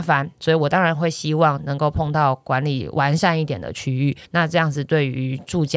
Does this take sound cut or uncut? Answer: cut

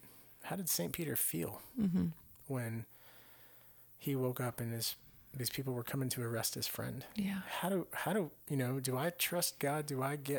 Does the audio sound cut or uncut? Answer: uncut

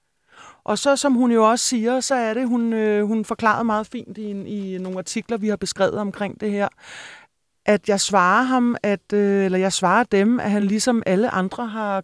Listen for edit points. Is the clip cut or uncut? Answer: uncut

